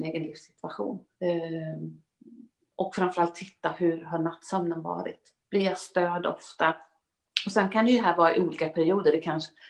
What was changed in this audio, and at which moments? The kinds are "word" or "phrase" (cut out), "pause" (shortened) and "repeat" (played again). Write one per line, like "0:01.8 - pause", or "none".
0:01.1 - pause
0:05.4 - pause